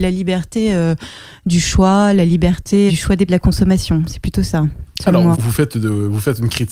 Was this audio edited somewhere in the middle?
yes; 3 cuts; at 2.9 s, 3.3 s, 5.3 s

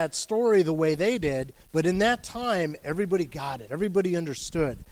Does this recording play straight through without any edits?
no; 1 cut; at 1.6 s

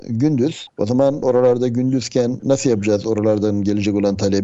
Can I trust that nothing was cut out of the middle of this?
yes; 0 cuts

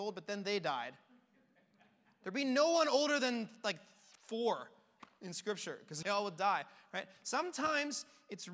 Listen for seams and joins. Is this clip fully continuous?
no; 1 cut; at 6.0 s

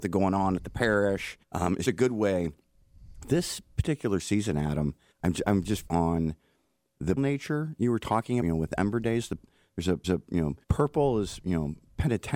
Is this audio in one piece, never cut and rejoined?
no; 8 cuts; at 1.4 s, 1.8 s, 5.1 s, 5.9 s, 7.2 s, 8.4 s, 10.0 s, 10.6 s

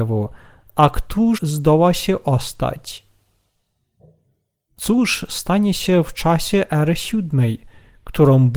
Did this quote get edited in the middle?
yes; 1 cut; at 1.4 s

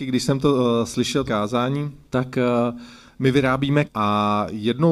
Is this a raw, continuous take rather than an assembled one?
no; 3 cuts; at 1.3 s, 2.1 s, 3.9 s

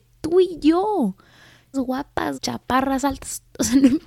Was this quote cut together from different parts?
yes; 2 cuts; at 1.7 s, 2.3 s

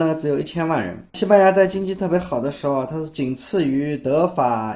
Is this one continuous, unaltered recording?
no; 1 cut; at 1.1 s

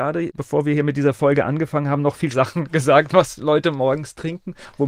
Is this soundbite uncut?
no; 1 cut; at 2.3 s

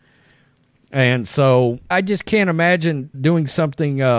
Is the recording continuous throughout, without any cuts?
no; 2 cuts; at 1.9 s, 3.1 s

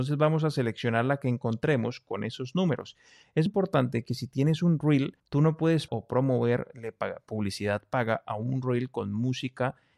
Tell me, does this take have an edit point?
yes; 3 cuts; at 3.5 s, 5.2 s, 5.9 s

